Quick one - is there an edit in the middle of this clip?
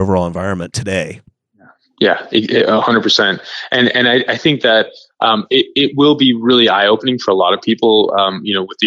no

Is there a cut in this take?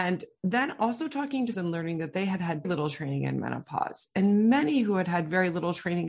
yes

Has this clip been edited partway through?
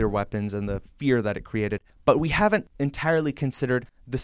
no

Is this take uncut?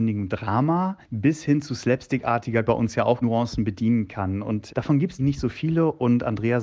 no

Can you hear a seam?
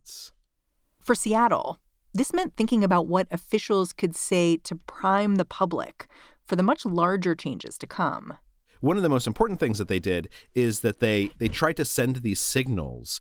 no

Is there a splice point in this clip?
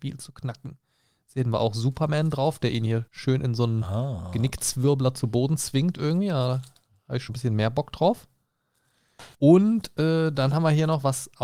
yes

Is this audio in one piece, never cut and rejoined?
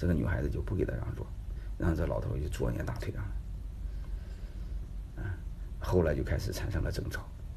yes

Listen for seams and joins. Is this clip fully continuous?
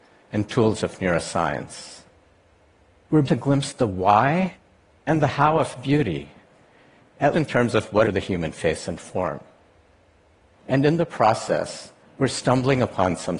no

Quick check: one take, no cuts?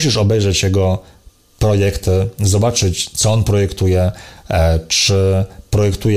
yes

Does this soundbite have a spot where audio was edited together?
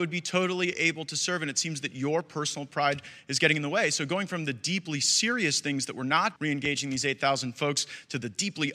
yes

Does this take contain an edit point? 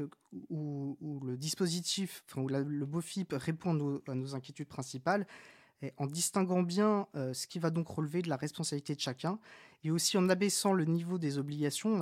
no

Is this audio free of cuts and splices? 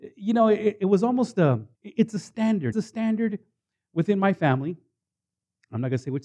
no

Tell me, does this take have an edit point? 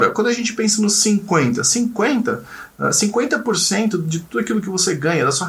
no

